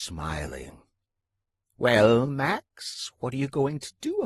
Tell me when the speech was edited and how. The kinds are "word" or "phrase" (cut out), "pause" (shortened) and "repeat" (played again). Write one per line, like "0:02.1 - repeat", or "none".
none

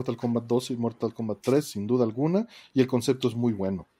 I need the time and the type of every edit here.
none

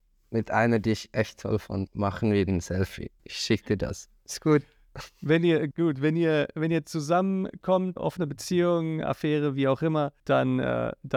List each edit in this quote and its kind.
0:01.9 - word
0:03.2 - pause
0:05.7 - word
0:08.0 - word
0:10.2 - pause

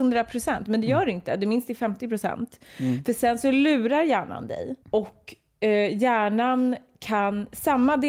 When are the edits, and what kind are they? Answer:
0:04.8 - pause

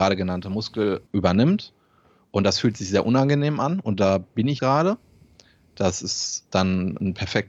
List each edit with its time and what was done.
0:01.1 - word
0:04.6 - word

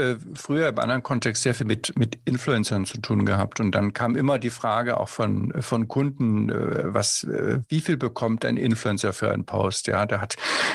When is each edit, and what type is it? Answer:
none

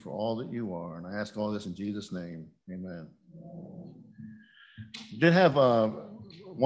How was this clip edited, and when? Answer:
none

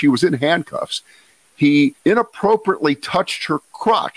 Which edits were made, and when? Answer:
0:02.0 - pause

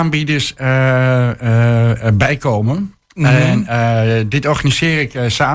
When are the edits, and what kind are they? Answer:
none

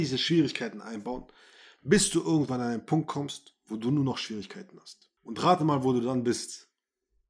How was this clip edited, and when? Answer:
none

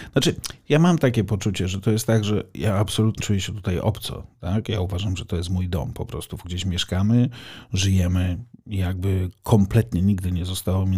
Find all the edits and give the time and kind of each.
0:03.2 - word
0:06.4 - word

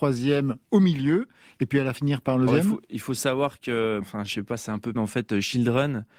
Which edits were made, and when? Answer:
0:01.9 - word
0:02.5 - word
0:04.0 - word
0:04.9 - word

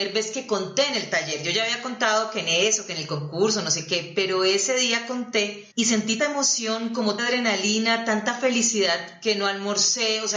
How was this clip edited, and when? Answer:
0:05.7 - pause
0:06.2 - word
0:07.2 - word

